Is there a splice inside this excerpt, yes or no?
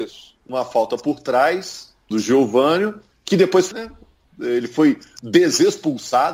yes